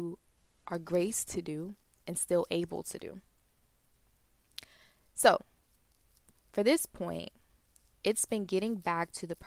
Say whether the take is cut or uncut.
uncut